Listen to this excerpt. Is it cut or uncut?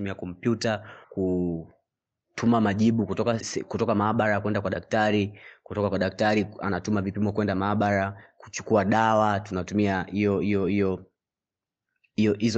cut